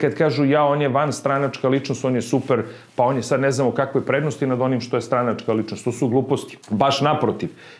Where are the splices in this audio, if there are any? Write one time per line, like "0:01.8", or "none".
0:06.6